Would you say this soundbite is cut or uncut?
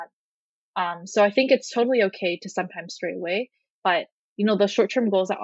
uncut